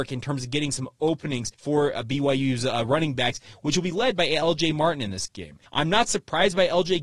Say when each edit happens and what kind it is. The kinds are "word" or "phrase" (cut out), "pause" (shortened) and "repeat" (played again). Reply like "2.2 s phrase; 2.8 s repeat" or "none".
1.5 s pause; 5.7 s pause